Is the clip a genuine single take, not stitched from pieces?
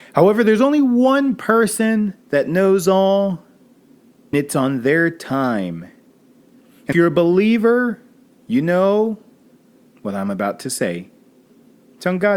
no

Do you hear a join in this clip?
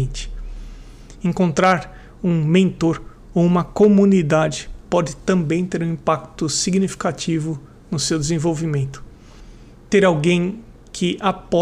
no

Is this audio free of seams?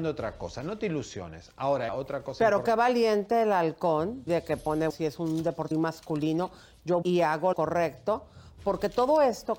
no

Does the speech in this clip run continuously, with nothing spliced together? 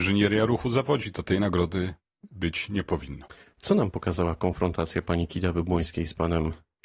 yes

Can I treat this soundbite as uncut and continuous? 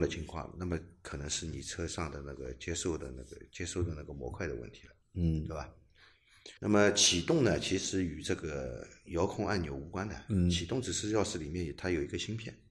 no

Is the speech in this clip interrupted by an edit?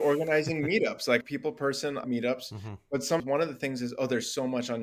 yes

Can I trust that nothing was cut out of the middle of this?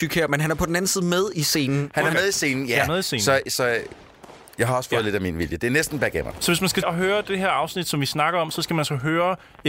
no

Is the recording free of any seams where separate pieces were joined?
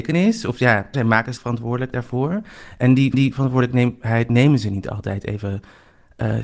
no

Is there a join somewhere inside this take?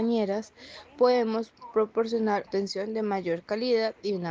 yes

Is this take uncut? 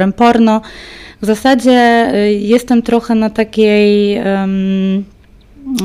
yes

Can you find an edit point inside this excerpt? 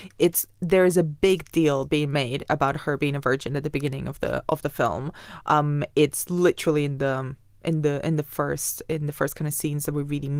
no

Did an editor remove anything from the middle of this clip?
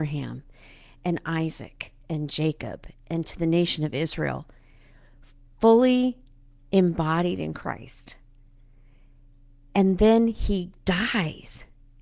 no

